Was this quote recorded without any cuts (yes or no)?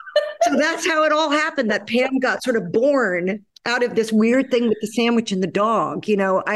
yes